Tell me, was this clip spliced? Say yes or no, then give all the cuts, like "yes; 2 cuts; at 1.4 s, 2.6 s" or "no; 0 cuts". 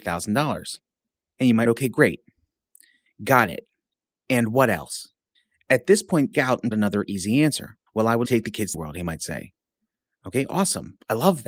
yes; 8 cuts; at 1.2 s, 1.7 s, 5.4 s, 6.3 s, 6.7 s, 7.9 s, 8.3 s, 8.7 s